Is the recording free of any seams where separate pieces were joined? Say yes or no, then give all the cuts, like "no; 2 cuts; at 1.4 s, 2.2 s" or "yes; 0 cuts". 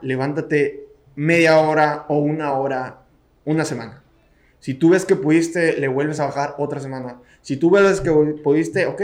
yes; 0 cuts